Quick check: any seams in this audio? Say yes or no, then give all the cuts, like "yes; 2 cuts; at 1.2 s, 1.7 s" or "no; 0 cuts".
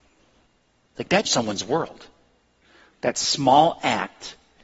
yes; 1 cut; at 1.2 s